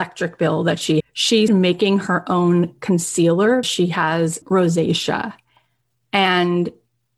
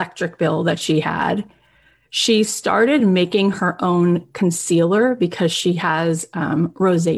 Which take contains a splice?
first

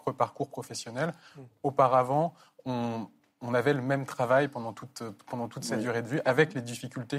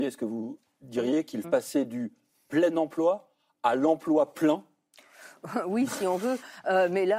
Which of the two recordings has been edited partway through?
second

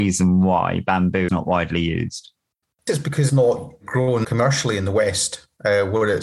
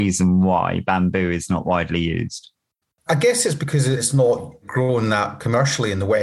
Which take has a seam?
first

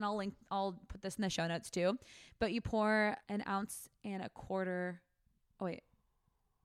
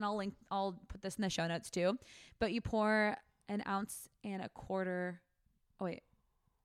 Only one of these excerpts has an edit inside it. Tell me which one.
first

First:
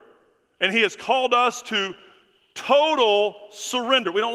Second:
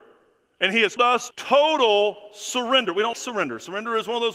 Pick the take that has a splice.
second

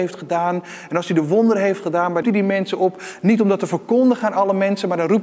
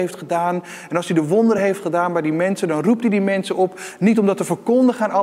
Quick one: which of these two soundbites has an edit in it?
first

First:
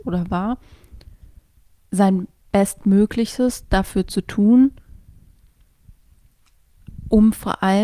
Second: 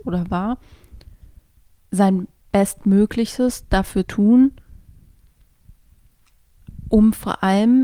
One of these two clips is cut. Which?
second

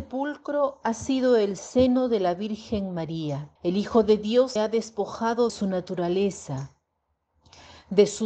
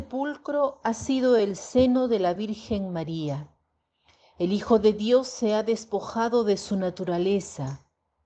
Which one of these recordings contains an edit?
first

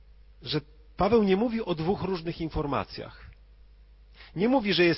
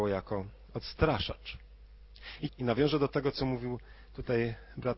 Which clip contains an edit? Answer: second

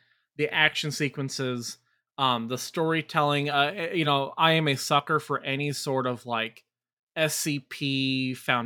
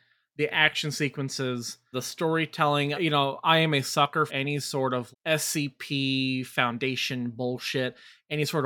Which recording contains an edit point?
second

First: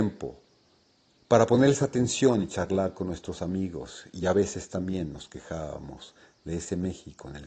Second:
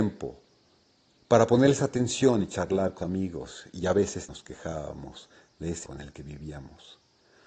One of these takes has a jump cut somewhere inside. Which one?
second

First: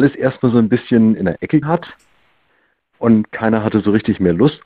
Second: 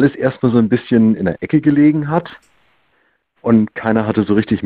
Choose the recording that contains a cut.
first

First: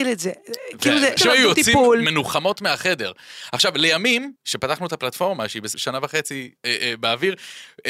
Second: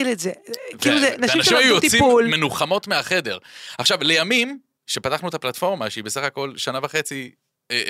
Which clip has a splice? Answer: first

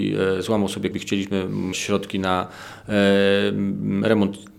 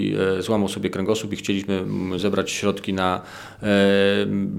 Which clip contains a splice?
first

